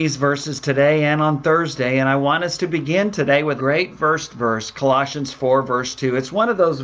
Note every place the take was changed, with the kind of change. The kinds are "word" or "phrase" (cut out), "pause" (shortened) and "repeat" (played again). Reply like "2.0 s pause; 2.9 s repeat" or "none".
3.6 s word